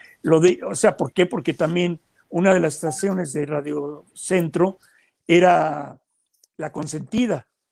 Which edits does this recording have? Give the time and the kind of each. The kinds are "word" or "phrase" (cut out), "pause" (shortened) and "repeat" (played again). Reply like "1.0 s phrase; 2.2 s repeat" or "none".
none

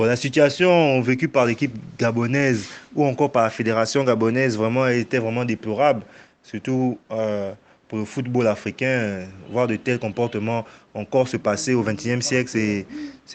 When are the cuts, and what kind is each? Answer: none

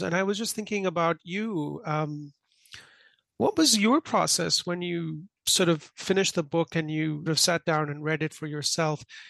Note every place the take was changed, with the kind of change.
7.3 s word

